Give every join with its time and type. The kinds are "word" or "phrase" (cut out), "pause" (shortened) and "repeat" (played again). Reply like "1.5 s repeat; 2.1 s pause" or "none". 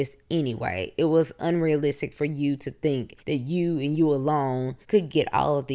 3.2 s pause; 4.8 s pause